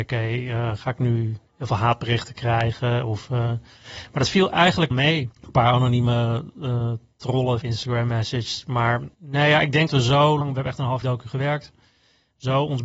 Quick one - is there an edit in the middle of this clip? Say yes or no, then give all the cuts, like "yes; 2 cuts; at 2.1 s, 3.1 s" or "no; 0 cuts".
yes; 8 cuts; at 1.5 s, 4.9 s, 5.3 s, 7.6 s, 9.1 s, 9.9 s, 10.4 s, 11.0 s